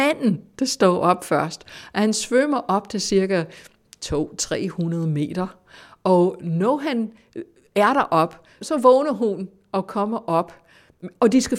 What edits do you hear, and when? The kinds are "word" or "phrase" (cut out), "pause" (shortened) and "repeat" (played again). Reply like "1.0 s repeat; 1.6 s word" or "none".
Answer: none